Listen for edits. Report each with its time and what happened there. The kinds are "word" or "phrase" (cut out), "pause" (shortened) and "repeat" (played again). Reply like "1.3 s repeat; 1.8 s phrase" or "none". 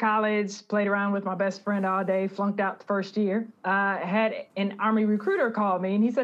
3.6 s pause